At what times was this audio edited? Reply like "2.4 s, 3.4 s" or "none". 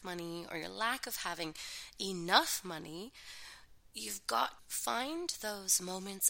4.6 s